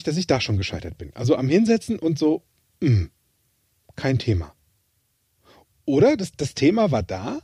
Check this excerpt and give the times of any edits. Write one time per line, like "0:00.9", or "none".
none

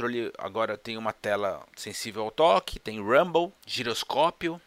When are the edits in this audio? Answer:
none

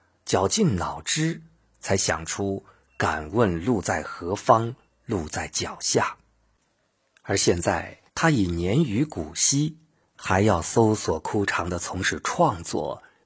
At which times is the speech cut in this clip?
0:08.1

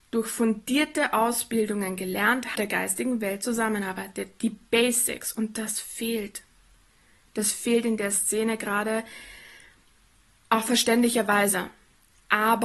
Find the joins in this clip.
0:02.5

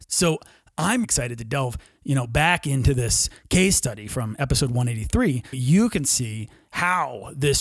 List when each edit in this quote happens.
0:01.0
0:05.5

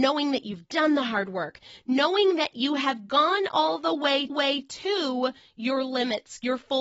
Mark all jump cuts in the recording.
0:04.3

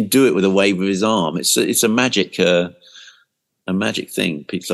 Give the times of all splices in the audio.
none

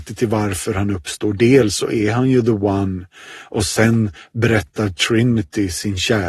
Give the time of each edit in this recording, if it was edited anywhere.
none

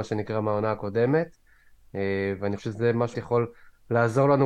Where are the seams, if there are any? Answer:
0:02.6
0:03.1

